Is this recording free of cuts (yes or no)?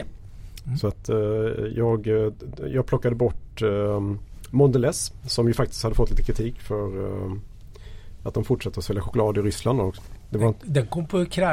yes